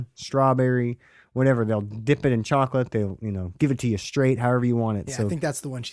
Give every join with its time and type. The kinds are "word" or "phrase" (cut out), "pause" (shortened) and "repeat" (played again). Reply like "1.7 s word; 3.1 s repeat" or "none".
none